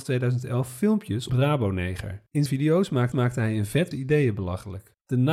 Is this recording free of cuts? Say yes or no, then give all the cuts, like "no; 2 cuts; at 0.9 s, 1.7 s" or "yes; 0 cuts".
no; 4 cuts; at 1.3 s, 2.5 s, 3.1 s, 3.9 s